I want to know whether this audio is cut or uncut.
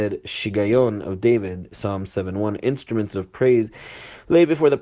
uncut